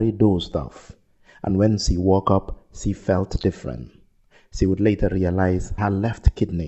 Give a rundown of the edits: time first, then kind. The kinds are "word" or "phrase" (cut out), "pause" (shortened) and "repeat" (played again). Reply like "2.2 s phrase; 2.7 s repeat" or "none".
none